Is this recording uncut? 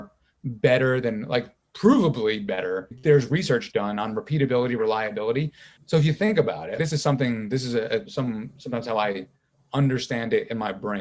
yes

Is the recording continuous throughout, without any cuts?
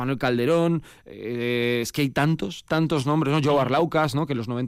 yes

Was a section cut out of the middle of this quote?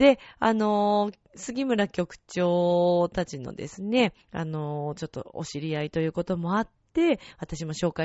yes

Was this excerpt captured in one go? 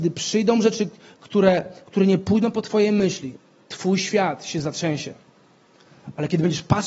yes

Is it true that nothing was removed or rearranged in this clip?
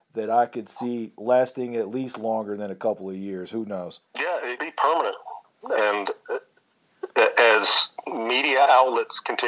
no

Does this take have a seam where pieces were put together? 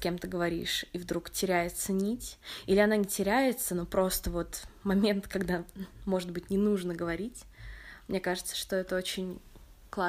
no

